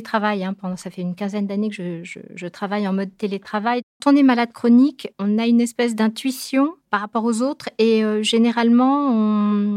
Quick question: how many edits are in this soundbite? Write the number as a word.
two